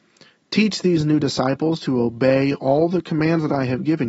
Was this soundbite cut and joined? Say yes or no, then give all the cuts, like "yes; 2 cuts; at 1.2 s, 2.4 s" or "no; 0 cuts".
no; 0 cuts